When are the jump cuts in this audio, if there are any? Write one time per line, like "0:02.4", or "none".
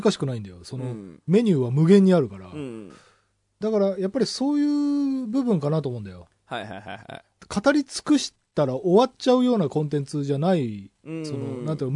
none

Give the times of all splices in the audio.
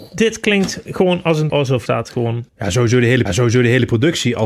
0:01.5
0:01.9
0:02.5
0:03.3

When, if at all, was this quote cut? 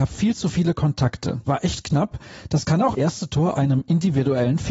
0:01.5
0:02.9
0:03.5

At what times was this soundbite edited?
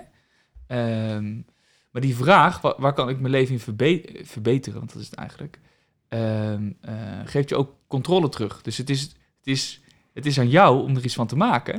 none

